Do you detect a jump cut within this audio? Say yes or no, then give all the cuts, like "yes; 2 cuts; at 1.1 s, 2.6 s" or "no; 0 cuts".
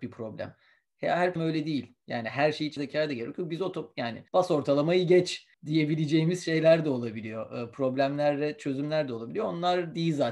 yes; 4 cuts; at 1.4 s, 2.8 s, 4.3 s, 5.5 s